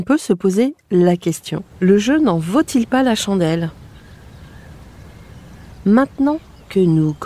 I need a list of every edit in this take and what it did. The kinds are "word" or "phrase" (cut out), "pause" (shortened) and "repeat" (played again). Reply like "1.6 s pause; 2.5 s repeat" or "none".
1.7 s pause

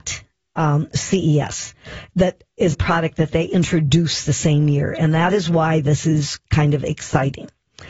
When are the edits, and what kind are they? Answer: 2.7 s word

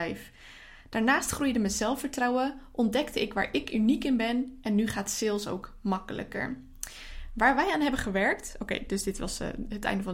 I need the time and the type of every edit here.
none

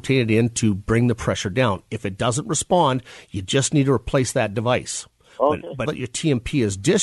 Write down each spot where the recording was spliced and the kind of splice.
5.9 s word

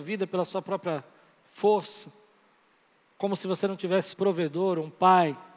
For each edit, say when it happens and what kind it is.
4.1 s word

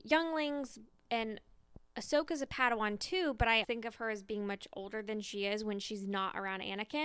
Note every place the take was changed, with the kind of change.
3.6 s word

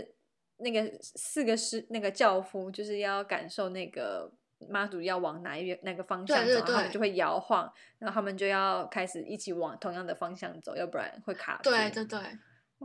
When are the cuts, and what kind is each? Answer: none

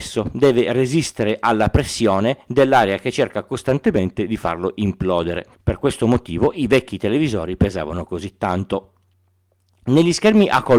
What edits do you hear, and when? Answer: 5.5 s pause

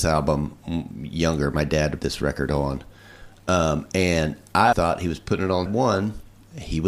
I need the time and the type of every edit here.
2.0 s word; 4.7 s word; 5.7 s word

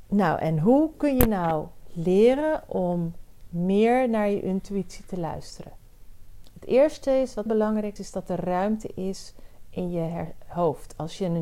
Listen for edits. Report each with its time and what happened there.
7.5 s word; 8.0 s word

